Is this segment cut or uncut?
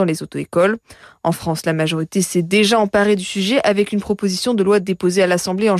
uncut